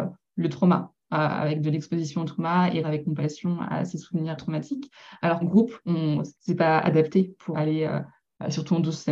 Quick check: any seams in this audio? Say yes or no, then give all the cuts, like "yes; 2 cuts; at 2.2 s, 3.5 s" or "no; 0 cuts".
yes; 5 cuts; at 2.8 s, 4.4 s, 5.4 s, 6.4 s, 7.5 s